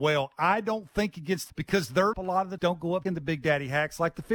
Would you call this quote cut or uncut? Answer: cut